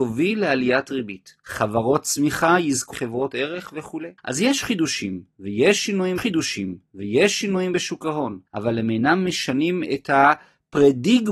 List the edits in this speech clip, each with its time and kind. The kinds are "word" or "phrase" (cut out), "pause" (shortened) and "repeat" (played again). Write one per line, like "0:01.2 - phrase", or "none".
0:01.4 - pause
0:02.9 - phrase
0:04.2 - pause
0:06.2 - repeat
0:08.5 - pause